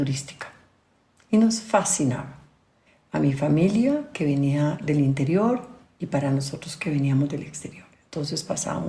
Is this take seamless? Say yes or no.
yes